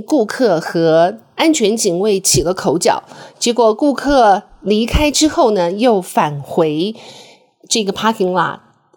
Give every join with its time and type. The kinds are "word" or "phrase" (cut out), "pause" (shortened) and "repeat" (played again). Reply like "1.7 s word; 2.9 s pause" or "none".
none